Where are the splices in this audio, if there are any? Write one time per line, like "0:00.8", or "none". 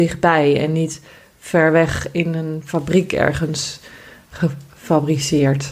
none